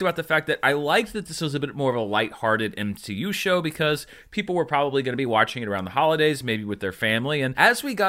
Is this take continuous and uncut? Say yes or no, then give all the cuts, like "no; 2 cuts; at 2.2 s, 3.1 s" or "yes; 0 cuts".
yes; 0 cuts